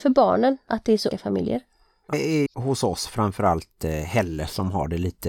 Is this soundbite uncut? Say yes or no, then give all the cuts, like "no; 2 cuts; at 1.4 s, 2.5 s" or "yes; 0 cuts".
no; 3 cuts; at 1.1 s, 2.1 s, 2.5 s